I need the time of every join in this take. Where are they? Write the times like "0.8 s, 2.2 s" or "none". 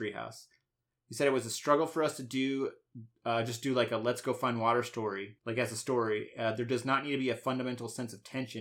5.4 s